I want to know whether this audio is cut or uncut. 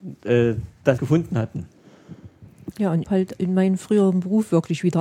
cut